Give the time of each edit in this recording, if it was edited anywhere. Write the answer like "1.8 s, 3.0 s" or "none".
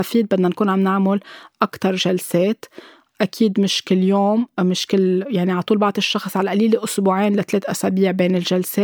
none